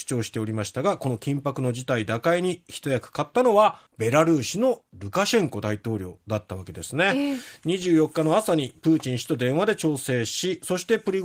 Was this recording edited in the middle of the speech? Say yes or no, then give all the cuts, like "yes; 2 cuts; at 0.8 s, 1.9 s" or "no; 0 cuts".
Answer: yes; 1 cut; at 3.9 s